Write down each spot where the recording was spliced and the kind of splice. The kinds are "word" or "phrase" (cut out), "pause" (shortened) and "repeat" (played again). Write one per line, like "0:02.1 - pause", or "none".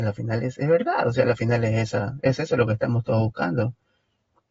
none

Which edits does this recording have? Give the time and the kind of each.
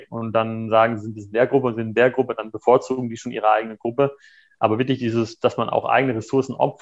none

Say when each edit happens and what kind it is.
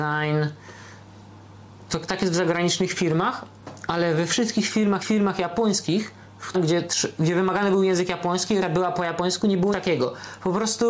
0:05.0 - repeat
0:06.5 - phrase
0:08.6 - word
0:09.7 - word

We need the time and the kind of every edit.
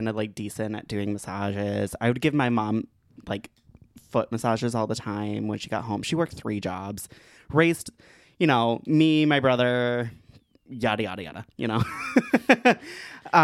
none

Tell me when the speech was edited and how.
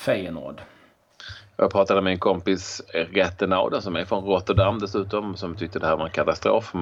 none

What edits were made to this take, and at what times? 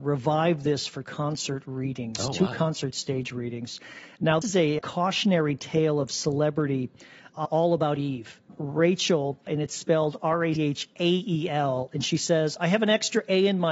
0:01.0 - word
0:04.4 - word
0:04.8 - word
0:07.4 - word
0:09.5 - word
0:10.6 - word

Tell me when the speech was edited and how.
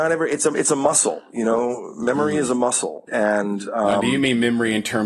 0:03.1 - word

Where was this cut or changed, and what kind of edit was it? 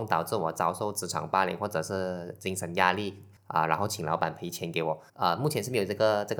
0:03.4 - pause
0:05.1 - pause

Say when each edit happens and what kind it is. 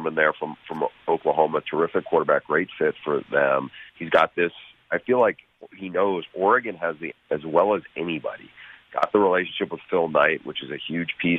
0:03.9 - pause
0:07.1 - phrase

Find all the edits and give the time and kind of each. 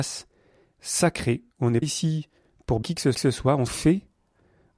0:01.5 - pause
0:01.8 - word
0:02.8 - word
0:03.1 - repeat
0:03.7 - phrase

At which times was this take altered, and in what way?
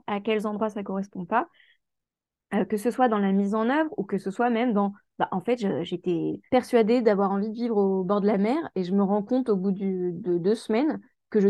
0:06.5 - pause

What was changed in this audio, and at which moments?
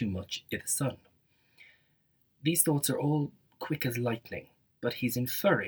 none

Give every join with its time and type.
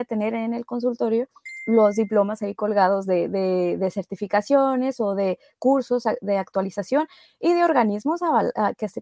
none

